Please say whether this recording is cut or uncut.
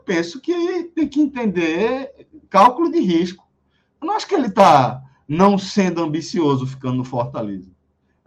uncut